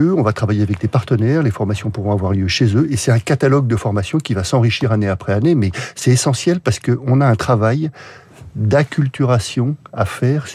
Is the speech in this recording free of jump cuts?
yes; 0 cuts

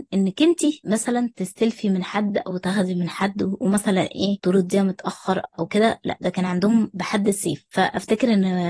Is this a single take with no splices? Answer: yes; 0 cuts

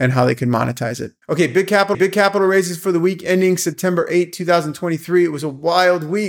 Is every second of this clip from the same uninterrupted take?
no; 2 cuts; at 1.2 s, 1.9 s

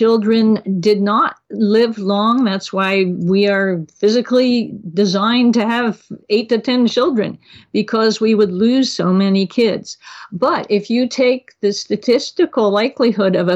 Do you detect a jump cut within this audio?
no; 0 cuts

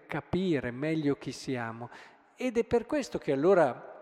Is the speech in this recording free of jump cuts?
yes; 0 cuts

